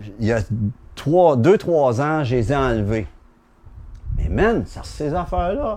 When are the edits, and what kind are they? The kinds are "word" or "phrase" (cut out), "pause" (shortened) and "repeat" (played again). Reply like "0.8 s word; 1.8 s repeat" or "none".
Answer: 4.8 s word